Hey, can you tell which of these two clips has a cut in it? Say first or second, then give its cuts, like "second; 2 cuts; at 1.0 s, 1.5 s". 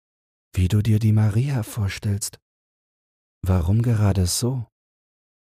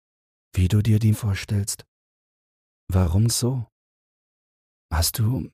second; 2 cuts; at 1.1 s, 3.3 s